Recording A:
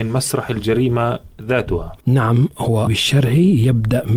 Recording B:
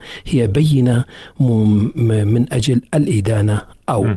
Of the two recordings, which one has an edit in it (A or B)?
A